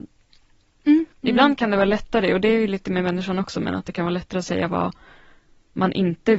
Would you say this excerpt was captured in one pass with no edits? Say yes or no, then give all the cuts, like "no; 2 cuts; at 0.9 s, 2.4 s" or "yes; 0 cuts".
no; 1 cut; at 1.1 s